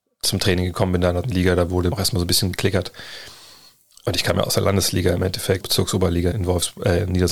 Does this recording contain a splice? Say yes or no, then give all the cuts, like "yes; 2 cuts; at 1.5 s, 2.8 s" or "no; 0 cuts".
yes; 5 cuts; at 1.2 s, 1.9 s, 4.5 s, 5.6 s, 6.3 s